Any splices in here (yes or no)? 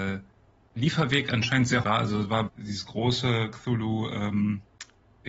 yes